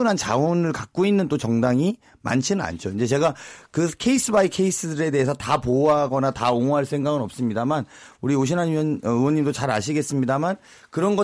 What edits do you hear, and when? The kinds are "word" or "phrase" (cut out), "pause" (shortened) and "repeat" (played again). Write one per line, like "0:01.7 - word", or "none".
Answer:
none